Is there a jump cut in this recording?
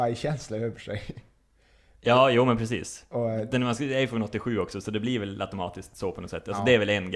no; 0 cuts

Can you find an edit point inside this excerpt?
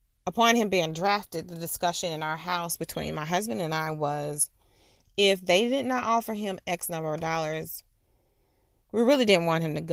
no; 0 cuts

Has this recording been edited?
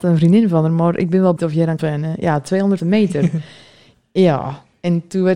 yes; 3 cuts; at 1.4 s, 1.8 s, 2.8 s

